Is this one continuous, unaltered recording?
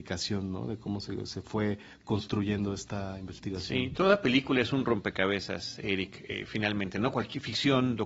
yes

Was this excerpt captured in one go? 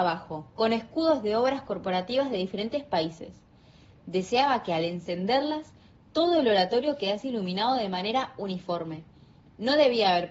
yes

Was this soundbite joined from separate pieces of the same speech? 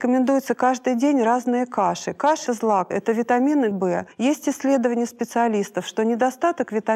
yes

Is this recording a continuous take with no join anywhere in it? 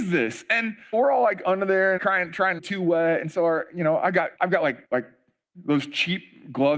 no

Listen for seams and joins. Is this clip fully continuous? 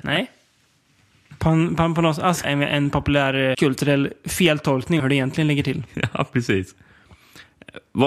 no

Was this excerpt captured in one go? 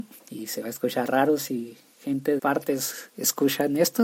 no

